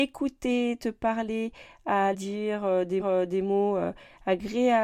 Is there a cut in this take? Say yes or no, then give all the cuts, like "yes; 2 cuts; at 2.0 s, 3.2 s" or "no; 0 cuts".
yes; 2 cuts; at 2.1 s, 3.0 s